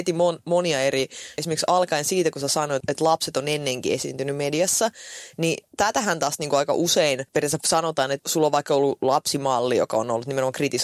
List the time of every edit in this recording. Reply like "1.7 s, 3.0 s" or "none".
1.4 s, 2.8 s, 5.7 s, 7.3 s, 8.2 s